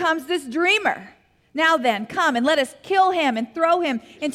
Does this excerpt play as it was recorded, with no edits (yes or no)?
yes